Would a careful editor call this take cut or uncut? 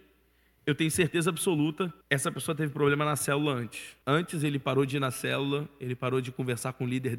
cut